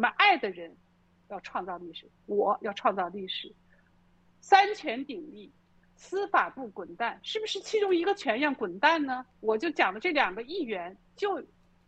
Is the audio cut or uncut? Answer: cut